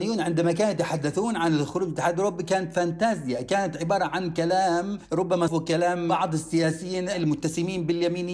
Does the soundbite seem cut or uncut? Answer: cut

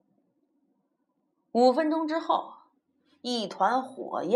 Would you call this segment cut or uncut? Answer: uncut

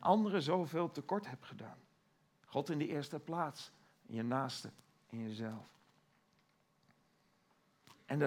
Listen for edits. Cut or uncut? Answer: uncut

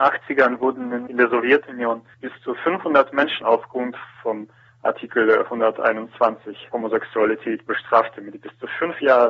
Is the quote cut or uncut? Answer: cut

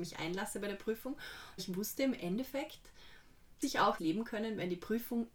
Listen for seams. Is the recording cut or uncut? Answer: cut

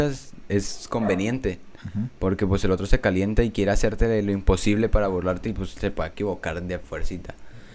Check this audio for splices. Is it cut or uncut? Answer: uncut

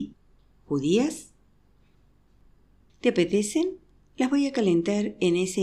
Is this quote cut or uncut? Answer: uncut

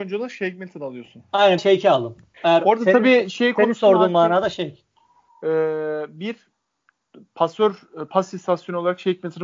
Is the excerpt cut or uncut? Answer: cut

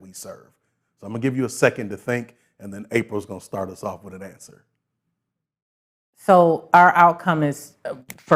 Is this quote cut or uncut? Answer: uncut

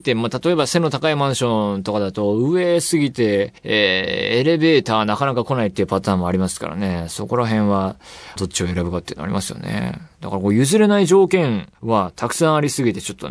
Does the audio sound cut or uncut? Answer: cut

